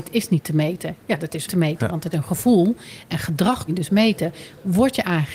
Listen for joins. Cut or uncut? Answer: cut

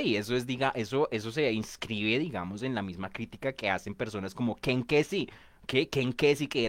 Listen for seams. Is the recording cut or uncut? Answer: uncut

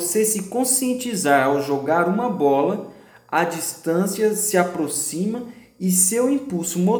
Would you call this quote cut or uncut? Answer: uncut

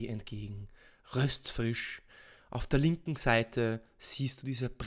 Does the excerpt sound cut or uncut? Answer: uncut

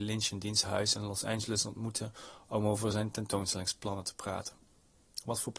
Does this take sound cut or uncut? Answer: uncut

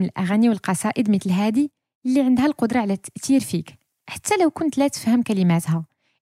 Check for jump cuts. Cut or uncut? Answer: uncut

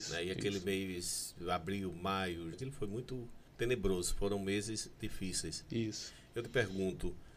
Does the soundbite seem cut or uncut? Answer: cut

